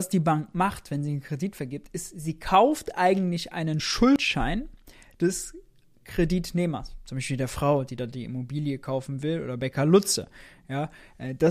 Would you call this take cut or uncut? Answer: uncut